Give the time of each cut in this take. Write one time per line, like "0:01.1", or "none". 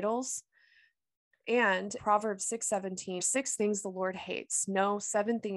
0:02.0
0:03.2